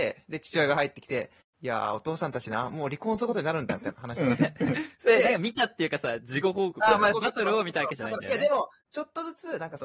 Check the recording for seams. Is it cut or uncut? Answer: cut